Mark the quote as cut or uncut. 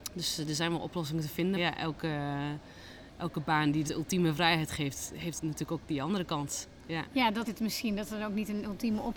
cut